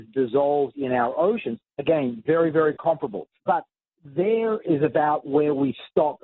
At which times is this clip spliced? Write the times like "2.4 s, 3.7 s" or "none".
1.7 s, 3.3 s